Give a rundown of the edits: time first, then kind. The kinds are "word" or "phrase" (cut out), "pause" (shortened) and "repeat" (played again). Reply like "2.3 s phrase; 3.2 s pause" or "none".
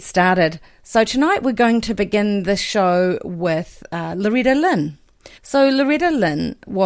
5.4 s pause